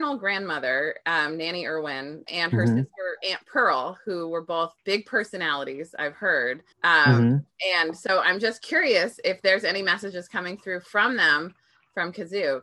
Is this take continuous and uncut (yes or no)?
no